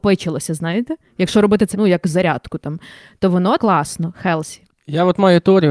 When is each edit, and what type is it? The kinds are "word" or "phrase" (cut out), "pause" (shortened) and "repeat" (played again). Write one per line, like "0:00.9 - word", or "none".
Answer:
0:01.7 - word
0:03.6 - word